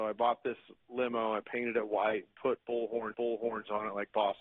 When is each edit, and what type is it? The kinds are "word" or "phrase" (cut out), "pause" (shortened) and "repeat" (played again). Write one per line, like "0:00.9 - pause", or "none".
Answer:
0:03.1 - repeat